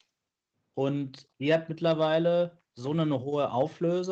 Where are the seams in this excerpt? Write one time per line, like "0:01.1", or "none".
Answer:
0:01.3
0:02.7